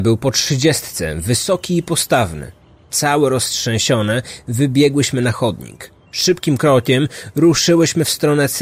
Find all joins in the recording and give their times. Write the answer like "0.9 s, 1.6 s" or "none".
none